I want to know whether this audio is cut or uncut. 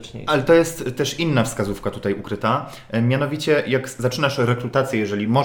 uncut